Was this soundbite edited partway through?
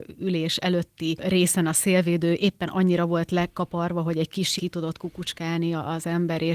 yes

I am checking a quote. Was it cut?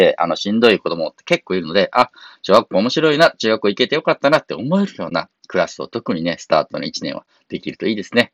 no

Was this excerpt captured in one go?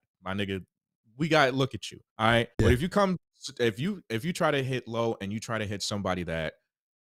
no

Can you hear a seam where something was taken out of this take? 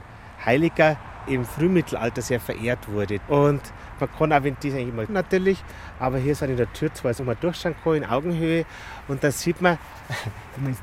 yes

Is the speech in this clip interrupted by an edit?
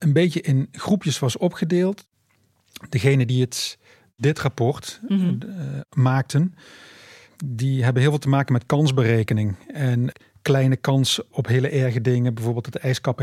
no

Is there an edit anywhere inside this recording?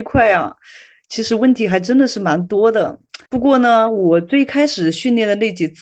yes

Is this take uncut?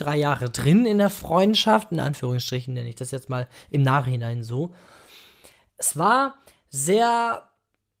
yes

